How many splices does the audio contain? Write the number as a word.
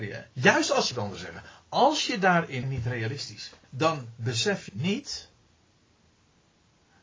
four